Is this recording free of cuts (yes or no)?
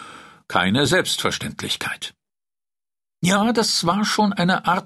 yes